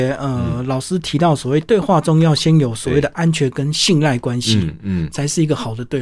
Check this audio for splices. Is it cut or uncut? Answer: uncut